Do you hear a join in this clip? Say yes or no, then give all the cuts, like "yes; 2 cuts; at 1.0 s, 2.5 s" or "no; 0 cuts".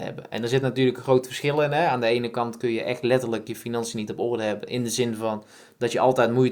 no; 0 cuts